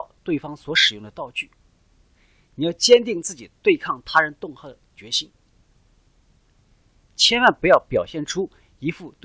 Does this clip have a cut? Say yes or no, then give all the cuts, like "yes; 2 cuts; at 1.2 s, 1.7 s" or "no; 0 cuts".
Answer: no; 0 cuts